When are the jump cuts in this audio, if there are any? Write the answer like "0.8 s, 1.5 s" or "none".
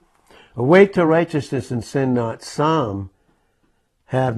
none